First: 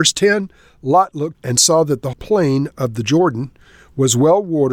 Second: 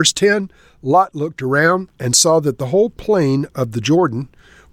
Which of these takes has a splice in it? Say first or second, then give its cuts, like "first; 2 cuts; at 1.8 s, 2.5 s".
first; 2 cuts; at 1.3 s, 2.1 s